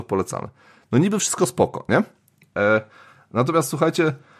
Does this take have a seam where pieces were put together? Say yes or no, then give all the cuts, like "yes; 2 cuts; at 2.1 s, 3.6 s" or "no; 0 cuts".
no; 0 cuts